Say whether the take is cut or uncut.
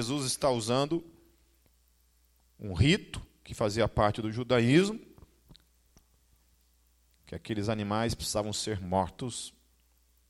uncut